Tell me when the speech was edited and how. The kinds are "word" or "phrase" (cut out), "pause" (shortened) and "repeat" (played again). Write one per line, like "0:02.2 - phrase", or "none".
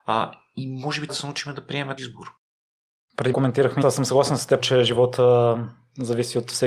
0:01.1 - word
0:02.0 - word
0:03.3 - word
0:03.8 - word
0:04.6 - word

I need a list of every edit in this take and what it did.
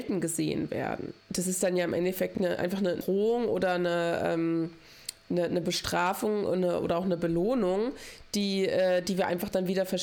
none

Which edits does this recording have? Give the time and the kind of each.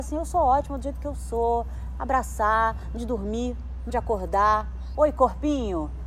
0:03.0 - word
0:03.9 - word
0:04.9 - word

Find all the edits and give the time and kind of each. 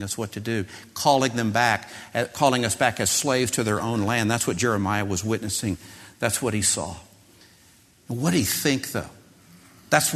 none

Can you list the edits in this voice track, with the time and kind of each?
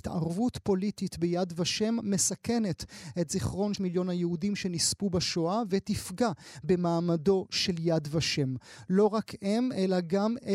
0:03.7 - word

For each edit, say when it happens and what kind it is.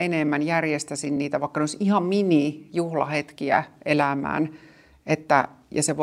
none

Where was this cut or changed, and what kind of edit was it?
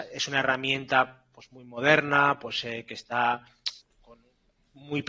0:03.8 - word

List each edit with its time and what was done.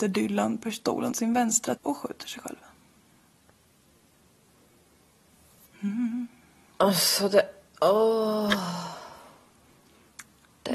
0:01.1 - word
0:01.8 - word
0:05.7 - pause

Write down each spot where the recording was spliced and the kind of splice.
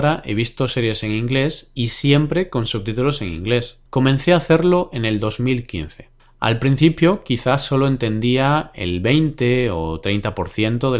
0:03.9 - pause
0:06.2 - pause

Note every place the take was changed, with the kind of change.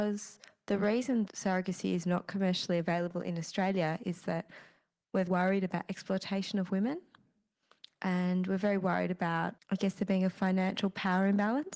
0:01.3 - word
0:05.3 - word
0:09.6 - pause

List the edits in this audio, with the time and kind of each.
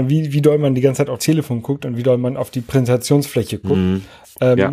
0:01.2 - word

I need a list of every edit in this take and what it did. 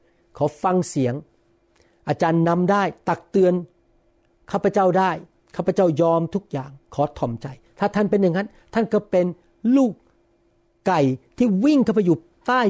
0:06.8 - pause

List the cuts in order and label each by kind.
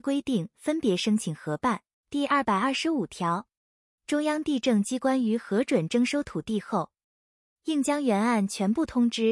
0:01.9 - pause

